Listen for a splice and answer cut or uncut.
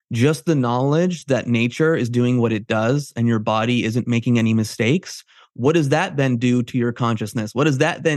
uncut